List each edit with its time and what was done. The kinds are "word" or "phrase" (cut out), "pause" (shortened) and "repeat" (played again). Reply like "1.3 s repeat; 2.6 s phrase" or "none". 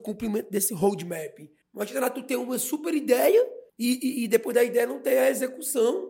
1.6 s pause; 3.7 s pause